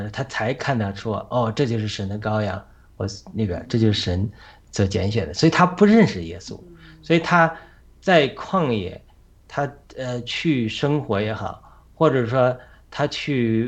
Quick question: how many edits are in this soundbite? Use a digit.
0